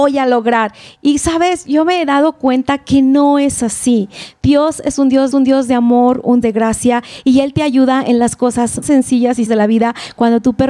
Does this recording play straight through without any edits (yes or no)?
no